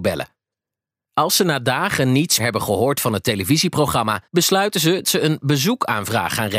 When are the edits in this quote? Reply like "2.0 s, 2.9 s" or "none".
2.4 s, 4.3 s, 5.0 s